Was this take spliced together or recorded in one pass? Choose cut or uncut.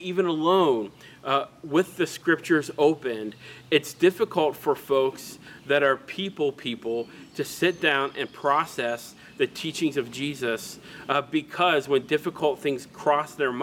uncut